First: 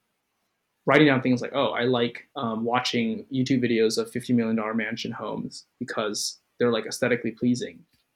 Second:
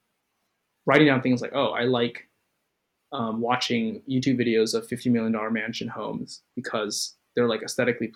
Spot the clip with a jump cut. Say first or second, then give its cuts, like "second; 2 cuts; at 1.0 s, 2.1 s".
first; 1 cut; at 2.3 s